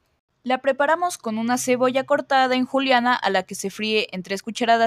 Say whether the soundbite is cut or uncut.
uncut